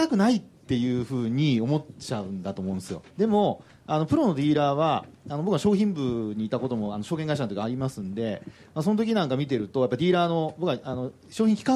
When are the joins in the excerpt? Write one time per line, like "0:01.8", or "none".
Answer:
0:03.1